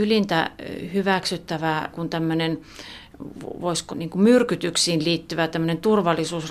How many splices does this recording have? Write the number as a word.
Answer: two